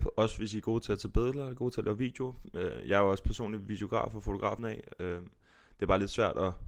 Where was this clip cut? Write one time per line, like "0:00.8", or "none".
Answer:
0:04.6